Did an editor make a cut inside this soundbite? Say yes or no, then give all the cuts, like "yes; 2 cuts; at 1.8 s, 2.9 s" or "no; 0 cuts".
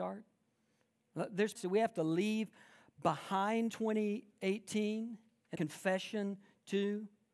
yes; 3 cuts; at 1.6 s, 3.7 s, 5.6 s